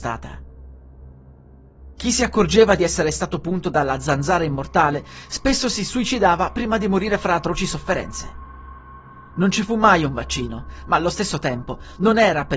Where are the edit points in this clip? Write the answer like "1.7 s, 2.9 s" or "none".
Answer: none